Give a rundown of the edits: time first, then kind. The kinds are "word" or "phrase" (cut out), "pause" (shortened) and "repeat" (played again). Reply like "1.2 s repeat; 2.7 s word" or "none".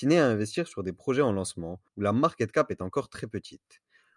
1.9 s pause

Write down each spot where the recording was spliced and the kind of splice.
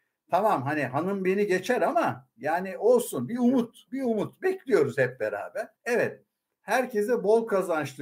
5.7 s pause

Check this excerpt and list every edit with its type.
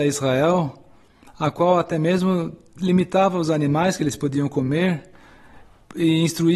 none

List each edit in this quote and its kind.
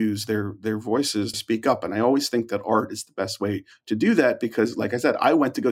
1.3 s phrase

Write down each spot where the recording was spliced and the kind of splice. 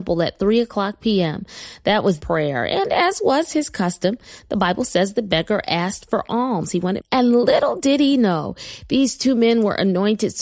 2.2 s phrase; 7.0 s word

